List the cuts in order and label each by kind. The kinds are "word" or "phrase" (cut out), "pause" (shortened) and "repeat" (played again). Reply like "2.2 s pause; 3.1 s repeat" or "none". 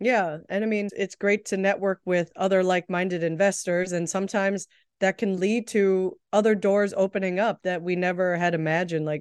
none